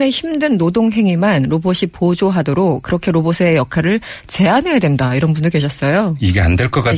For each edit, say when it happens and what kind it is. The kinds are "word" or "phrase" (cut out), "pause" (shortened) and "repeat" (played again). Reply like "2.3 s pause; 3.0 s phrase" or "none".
none